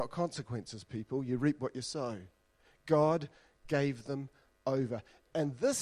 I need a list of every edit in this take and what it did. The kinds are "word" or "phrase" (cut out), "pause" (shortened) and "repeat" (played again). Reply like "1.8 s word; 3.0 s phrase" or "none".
none